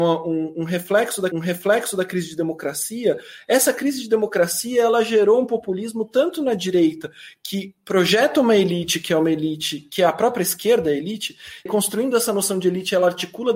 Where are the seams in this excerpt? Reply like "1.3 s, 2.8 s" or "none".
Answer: 1.3 s, 11.7 s